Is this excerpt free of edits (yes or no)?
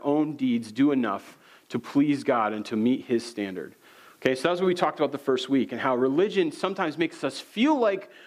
yes